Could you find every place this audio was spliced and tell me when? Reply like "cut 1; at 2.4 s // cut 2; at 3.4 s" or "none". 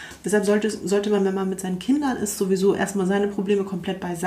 none